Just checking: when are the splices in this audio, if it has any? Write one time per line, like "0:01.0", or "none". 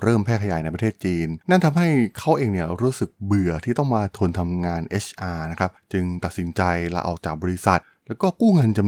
0:01.4